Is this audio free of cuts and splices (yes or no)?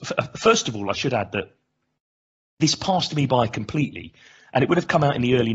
yes